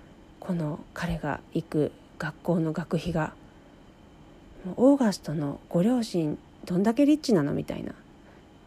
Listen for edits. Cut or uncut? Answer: cut